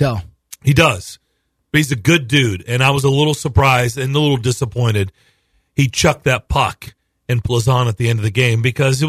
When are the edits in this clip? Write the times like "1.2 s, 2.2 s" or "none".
7.4 s